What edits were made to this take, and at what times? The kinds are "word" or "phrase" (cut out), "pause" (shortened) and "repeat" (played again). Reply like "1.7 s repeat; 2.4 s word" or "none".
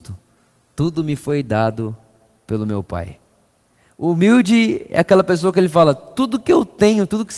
none